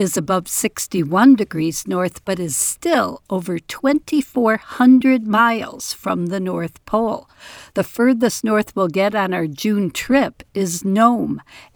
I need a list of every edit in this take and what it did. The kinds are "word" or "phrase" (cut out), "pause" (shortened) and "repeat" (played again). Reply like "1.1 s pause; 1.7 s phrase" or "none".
none